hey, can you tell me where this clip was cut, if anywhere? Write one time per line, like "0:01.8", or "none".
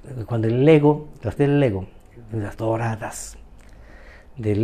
0:01.4
0:02.6